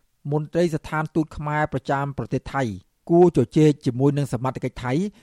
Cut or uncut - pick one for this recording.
uncut